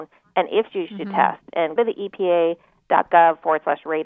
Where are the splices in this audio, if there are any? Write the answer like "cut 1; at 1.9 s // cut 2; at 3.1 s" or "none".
cut 1; at 1.8 s